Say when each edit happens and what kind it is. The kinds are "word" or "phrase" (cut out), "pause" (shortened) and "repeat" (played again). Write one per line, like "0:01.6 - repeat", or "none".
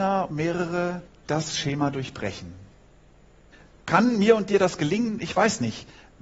0:01.1 - pause
0:03.5 - pause

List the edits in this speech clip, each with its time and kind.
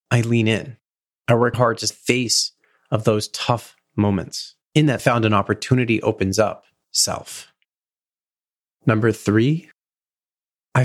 0:01.0 - pause
0:01.5 - word
0:01.9 - phrase
0:04.6 - pause
0:05.0 - phrase
0:06.8 - phrase

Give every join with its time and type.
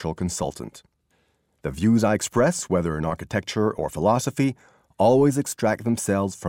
none

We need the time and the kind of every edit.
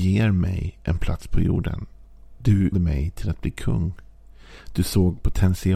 0:02.7 - word

